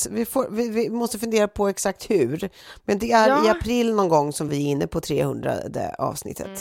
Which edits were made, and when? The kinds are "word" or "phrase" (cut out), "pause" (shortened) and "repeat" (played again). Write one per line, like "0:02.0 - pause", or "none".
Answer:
none